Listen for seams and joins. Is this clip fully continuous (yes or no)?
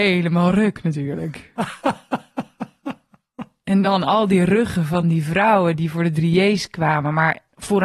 yes